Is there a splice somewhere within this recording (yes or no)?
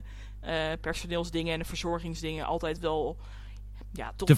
no